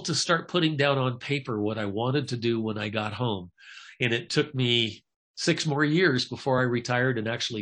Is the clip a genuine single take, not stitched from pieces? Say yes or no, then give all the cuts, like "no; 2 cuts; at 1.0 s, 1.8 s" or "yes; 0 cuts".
yes; 0 cuts